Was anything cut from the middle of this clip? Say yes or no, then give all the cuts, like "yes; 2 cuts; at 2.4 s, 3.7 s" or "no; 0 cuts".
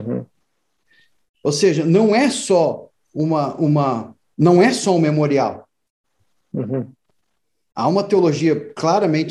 no; 0 cuts